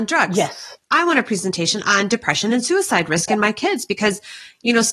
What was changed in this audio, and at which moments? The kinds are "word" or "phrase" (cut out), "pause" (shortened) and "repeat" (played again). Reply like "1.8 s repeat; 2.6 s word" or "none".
none

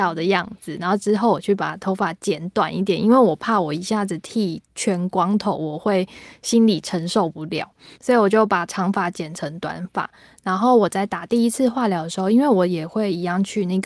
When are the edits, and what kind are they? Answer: 4.7 s pause; 7.9 s pause

